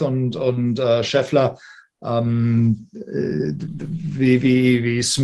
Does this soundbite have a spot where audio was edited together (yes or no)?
no